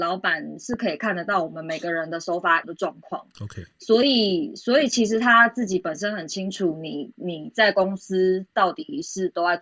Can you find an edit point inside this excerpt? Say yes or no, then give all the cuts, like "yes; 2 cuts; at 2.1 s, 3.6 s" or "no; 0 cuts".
yes; 1 cut; at 2.6 s